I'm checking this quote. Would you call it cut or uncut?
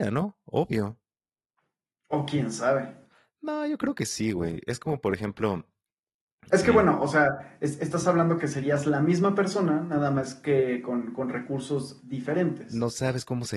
uncut